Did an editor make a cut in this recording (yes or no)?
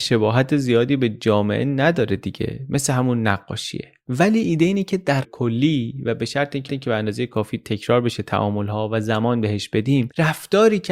yes